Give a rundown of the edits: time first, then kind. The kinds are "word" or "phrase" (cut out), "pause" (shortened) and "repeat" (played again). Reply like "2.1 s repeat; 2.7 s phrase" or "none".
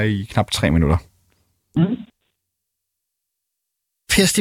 none